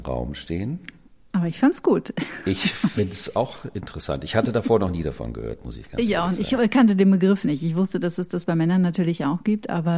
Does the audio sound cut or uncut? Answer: uncut